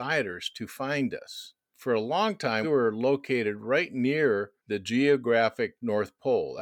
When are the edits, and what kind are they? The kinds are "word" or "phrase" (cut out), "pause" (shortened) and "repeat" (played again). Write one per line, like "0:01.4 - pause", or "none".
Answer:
0:02.6 - word
0:04.6 - pause

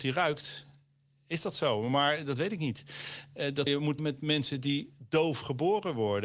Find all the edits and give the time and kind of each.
0:03.7 - word
0:04.0 - word

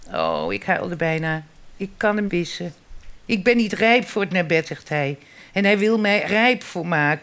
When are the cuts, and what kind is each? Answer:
0:02.3 - word
0:04.6 - word
0:06.2 - word

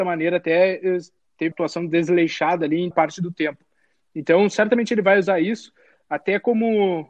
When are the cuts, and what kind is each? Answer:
0:01.5 - word
0:02.9 - word

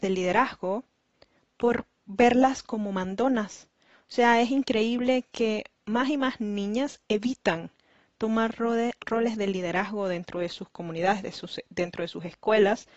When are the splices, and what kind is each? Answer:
0:05.7 - pause

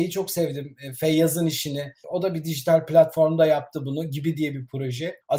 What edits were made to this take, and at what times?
none

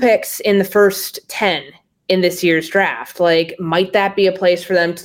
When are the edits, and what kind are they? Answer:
none

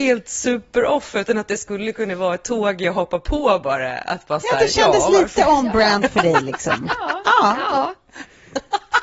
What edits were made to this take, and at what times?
none

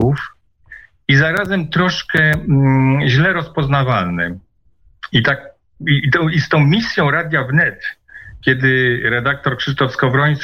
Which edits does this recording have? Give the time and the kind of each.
none

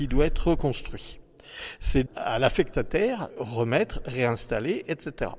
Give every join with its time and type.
0:02.1 - word
0:03.3 - word

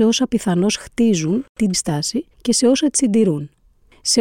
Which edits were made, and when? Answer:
0:01.7 - word
0:02.3 - pause

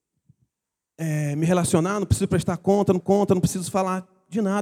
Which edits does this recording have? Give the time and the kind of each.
0:03.0 - repeat

